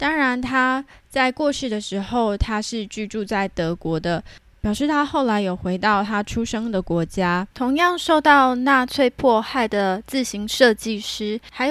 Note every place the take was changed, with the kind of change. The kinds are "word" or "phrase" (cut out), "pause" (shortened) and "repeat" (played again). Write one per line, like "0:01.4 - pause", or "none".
0:07.5 - pause